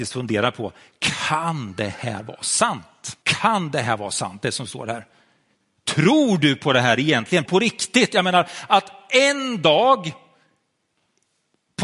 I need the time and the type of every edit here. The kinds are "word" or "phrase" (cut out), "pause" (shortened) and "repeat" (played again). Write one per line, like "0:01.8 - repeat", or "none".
0:03.2 - pause
0:07.4 - word